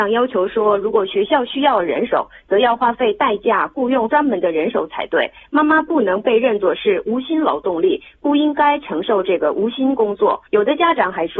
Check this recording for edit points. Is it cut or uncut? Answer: cut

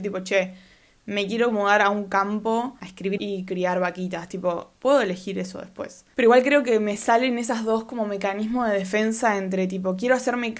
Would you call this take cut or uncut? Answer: cut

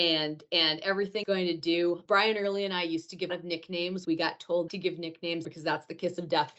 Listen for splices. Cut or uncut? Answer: cut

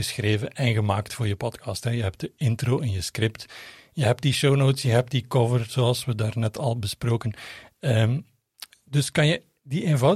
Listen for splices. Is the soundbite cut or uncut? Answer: uncut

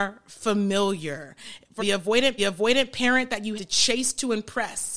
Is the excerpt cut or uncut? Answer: cut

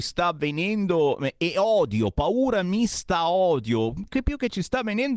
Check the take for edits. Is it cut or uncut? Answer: cut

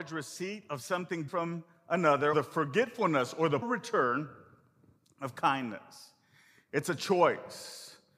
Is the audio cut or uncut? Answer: cut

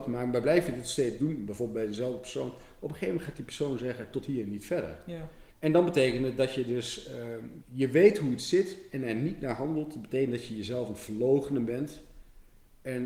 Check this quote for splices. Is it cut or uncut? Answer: cut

